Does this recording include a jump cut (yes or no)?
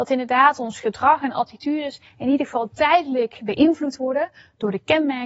no